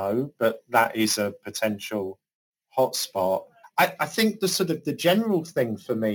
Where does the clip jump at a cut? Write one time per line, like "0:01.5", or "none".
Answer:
0:03.6